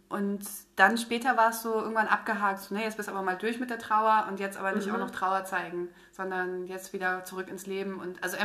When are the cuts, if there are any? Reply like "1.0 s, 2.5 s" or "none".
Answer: none